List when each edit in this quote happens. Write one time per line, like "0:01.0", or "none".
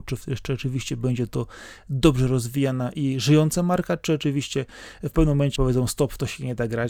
0:05.6

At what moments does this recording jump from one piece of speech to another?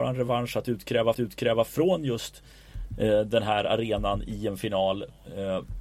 0:01.1

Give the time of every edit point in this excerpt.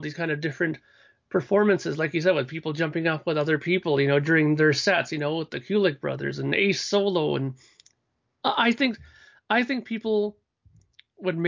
none

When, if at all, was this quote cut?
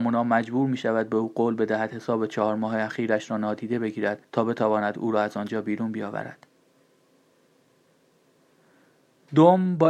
none

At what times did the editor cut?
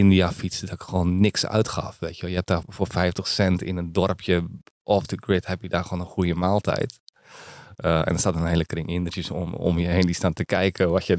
0:02.6

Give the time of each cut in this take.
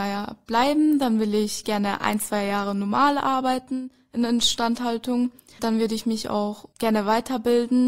none

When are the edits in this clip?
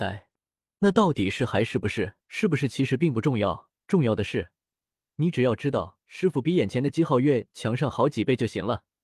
0:02.2
0:03.8
0:06.0

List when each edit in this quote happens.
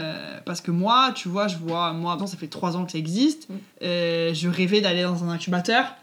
0:02.2
0:03.7

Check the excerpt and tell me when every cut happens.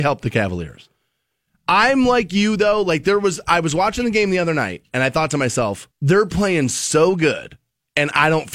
0:05.9

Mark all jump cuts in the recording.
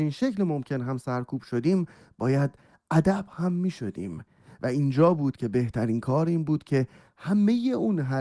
none

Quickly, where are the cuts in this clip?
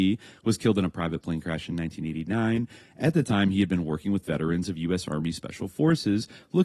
none

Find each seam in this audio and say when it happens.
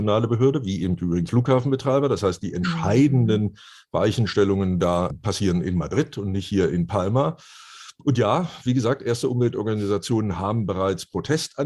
0:01.3
0:05.1

